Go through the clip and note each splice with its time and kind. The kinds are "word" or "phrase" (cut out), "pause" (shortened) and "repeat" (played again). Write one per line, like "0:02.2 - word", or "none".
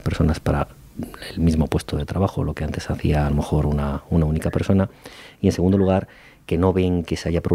none